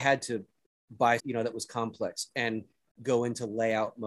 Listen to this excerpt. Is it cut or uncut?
cut